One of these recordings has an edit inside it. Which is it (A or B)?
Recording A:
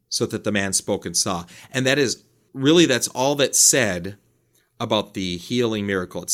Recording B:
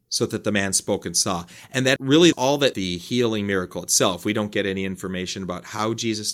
B